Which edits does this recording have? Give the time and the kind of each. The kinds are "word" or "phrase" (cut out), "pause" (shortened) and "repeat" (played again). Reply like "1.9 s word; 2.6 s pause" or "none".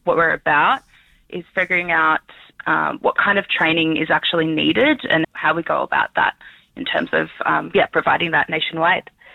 5.2 s word